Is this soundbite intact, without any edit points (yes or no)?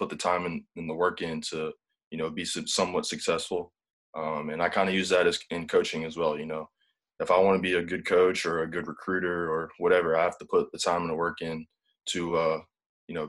yes